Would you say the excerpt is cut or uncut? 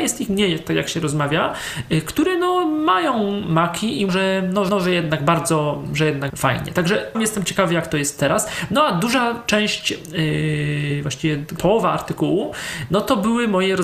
cut